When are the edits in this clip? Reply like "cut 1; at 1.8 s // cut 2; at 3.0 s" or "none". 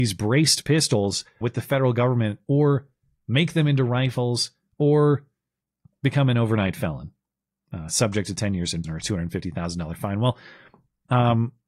cut 1; at 1.4 s // cut 2; at 8.8 s

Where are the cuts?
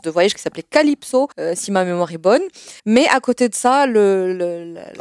cut 1; at 1.3 s // cut 2; at 2.8 s

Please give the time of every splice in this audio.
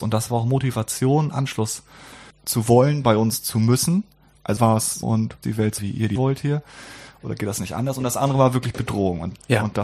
cut 1; at 2.3 s // cut 2; at 4.6 s // cut 3; at 5.0 s // cut 4; at 5.4 s // cut 5; at 5.8 s // cut 6; at 6.2 s

